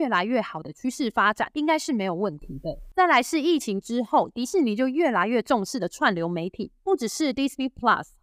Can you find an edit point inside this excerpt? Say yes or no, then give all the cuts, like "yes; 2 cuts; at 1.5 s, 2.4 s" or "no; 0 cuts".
no; 0 cuts